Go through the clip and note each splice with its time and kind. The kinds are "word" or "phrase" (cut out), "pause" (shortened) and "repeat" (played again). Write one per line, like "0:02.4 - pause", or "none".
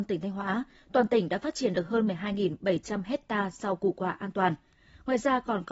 none